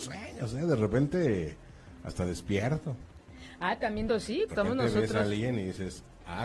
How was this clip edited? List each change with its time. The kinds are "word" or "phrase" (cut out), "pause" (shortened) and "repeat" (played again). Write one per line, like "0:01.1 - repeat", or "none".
0:04.1 - word
0:04.5 - word